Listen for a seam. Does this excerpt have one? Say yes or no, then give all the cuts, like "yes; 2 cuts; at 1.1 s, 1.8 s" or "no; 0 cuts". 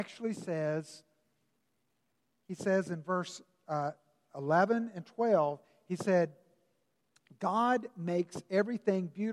no; 0 cuts